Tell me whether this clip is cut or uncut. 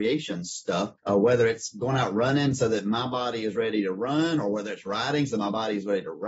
cut